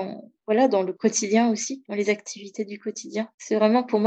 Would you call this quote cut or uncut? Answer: uncut